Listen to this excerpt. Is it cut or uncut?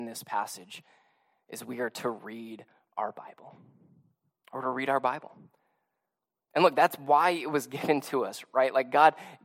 uncut